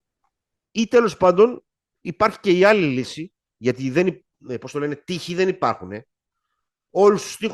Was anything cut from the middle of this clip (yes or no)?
no